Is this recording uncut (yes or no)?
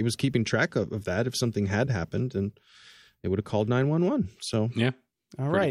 yes